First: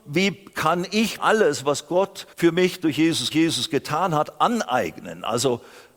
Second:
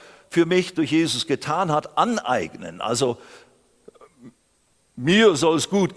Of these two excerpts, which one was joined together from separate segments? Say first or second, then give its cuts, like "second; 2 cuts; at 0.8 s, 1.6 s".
first; 3 cuts; at 1.2 s, 2.3 s, 3.3 s